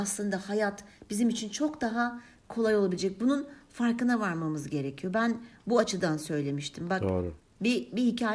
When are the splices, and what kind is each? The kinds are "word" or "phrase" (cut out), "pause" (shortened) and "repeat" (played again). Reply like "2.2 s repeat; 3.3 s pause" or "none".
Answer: none